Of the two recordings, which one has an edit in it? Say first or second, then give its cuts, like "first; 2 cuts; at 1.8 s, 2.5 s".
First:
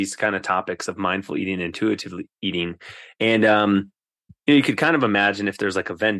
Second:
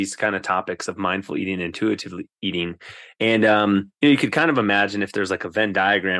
second; 1 cut; at 3.9 s